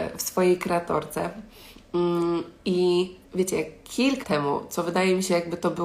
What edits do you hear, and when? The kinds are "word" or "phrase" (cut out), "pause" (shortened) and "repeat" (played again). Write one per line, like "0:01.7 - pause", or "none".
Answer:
0:03.2 - pause
0:04.2 - word